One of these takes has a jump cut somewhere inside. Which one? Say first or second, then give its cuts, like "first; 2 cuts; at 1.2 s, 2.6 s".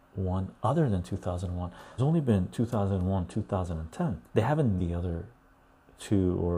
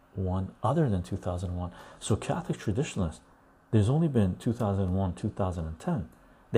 first; 3 cuts; at 2.0 s, 4.3 s, 4.8 s